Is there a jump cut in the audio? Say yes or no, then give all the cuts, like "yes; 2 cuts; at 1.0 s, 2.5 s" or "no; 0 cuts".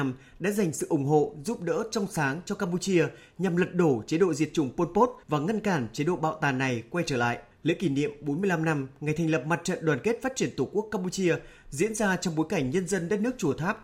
yes; 2 cuts; at 5.2 s, 7.5 s